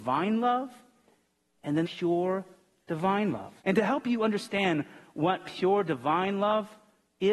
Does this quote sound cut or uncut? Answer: cut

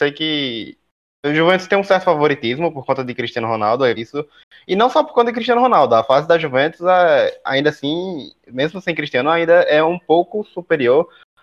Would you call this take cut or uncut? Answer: cut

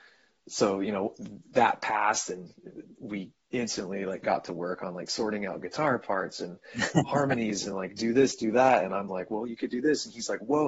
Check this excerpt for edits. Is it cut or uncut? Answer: uncut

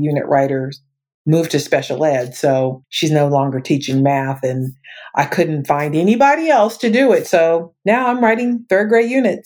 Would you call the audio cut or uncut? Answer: cut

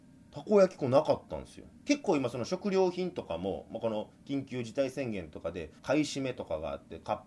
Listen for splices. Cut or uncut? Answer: cut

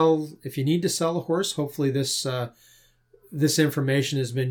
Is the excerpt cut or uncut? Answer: uncut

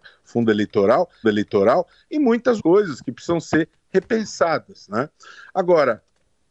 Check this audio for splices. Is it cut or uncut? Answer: cut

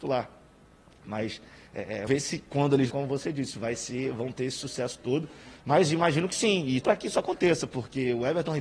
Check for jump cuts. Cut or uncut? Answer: cut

